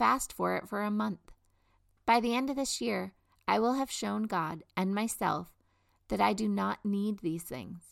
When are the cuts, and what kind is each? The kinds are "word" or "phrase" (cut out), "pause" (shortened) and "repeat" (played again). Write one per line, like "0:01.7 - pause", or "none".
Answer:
none